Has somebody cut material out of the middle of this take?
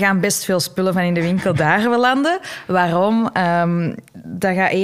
no; 0 cuts

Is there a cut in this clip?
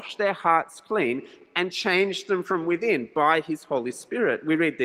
no; 0 cuts

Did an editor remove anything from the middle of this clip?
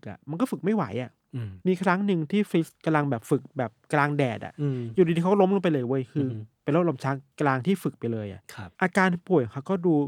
yes; 4 cuts; at 1.6 s, 2.7 s, 7.3 s, 8.7 s

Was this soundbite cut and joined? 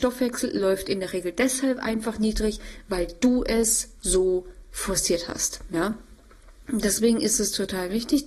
no; 0 cuts

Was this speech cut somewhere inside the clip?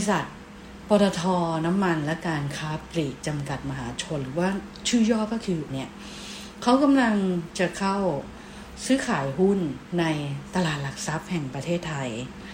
yes; 1 cut; at 5.7 s

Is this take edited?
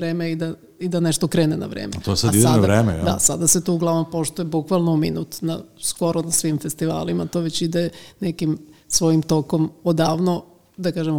no; 0 cuts

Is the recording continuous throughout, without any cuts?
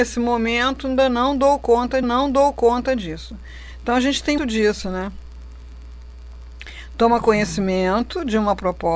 no; 2 cuts; at 2.0 s, 4.4 s

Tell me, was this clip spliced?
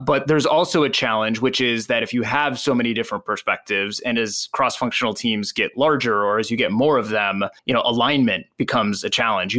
yes; 1 cut; at 7.6 s

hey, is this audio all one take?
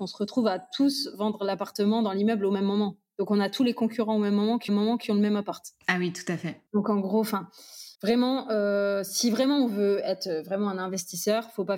no; 3 cuts; at 4.7 s, 6.7 s, 7.9 s

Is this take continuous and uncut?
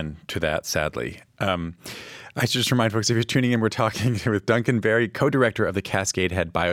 yes; 0 cuts

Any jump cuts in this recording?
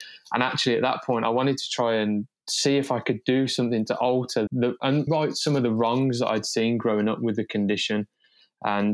yes; 2 cuts; at 4.5 s, 5.1 s

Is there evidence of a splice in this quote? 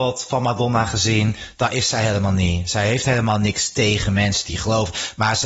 no; 0 cuts

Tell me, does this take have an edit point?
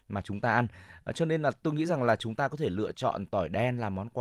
no; 0 cuts

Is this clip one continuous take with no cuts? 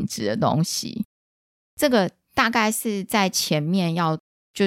yes; 0 cuts

